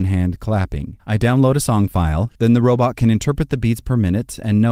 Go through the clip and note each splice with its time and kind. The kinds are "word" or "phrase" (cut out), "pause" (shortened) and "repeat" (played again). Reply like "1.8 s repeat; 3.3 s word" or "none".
1.0 s pause; 2.3 s pause